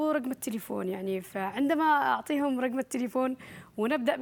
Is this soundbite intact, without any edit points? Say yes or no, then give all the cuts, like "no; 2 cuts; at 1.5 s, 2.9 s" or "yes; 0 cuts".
yes; 0 cuts